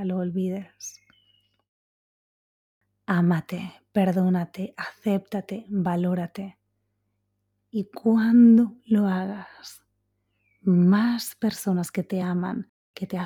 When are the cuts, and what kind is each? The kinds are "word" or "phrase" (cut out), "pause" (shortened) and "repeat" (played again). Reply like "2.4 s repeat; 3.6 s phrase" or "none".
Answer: none

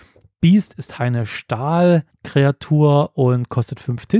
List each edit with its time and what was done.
0.9 s word; 2.1 s pause

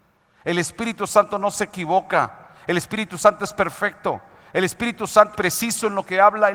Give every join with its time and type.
5.3 s word

